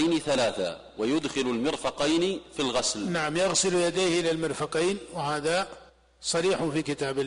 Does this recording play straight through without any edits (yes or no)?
no